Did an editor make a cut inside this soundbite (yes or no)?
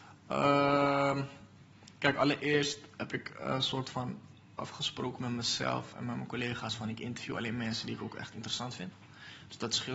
no